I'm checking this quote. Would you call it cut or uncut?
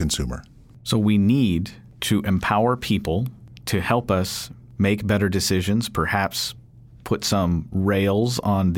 uncut